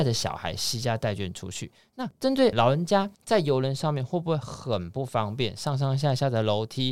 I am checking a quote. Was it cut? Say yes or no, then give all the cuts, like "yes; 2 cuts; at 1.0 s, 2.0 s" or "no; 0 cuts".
yes; 1 cut; at 3.1 s